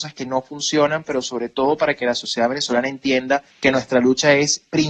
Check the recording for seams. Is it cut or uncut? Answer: cut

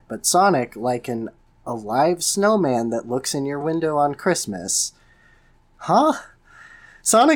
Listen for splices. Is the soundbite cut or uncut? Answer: uncut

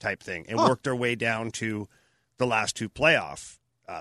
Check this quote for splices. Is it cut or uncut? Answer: uncut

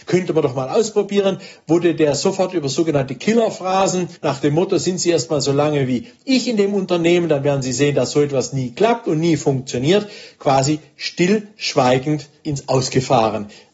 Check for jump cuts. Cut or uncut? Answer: cut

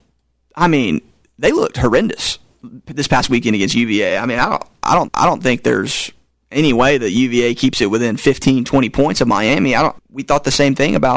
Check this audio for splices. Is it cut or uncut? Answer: cut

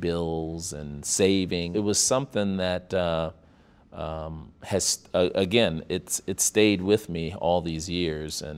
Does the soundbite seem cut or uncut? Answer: uncut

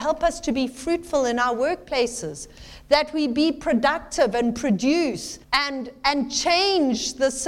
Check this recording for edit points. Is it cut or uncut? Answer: cut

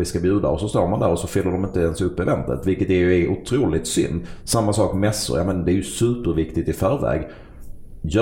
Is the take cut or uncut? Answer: uncut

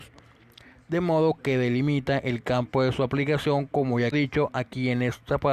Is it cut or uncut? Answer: cut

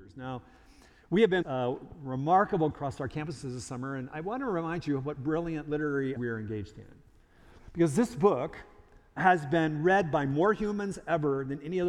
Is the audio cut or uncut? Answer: cut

